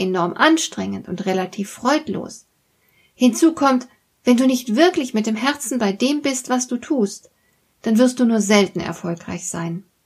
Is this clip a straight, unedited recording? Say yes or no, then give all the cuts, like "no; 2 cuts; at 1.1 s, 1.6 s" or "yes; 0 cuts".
yes; 0 cuts